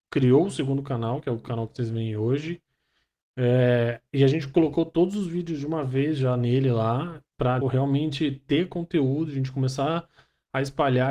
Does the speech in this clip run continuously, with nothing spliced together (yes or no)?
no